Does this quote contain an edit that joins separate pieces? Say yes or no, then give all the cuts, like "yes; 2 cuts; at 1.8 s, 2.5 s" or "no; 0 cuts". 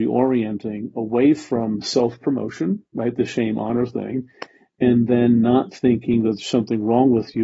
yes; 1 cut; at 2.9 s